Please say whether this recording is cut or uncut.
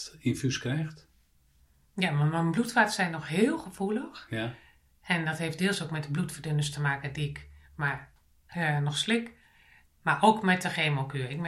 uncut